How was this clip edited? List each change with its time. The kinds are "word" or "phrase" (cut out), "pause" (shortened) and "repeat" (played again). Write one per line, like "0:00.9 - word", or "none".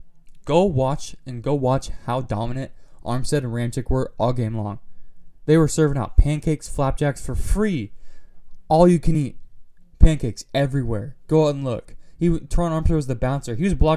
none